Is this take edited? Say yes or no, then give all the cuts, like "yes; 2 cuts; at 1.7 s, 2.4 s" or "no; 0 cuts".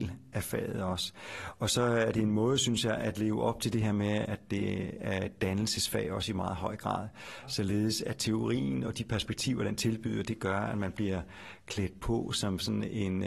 no; 0 cuts